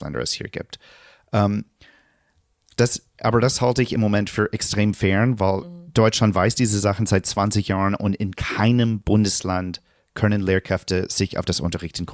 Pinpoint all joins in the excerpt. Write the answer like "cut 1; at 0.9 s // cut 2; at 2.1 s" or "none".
none